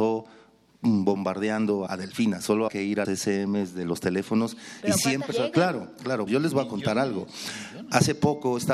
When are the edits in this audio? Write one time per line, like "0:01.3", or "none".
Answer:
0:01.9
0:02.7
0:03.0
0:05.3
0:06.3